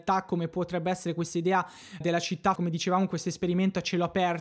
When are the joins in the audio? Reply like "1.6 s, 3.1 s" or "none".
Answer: 2.0 s, 2.6 s